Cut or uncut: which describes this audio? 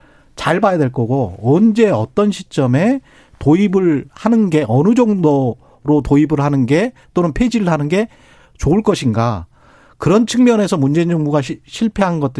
uncut